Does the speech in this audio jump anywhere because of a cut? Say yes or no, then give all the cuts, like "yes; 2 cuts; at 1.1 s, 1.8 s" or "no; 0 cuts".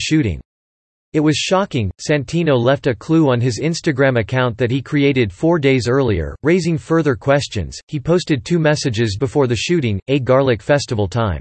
yes; 1 cut; at 9.2 s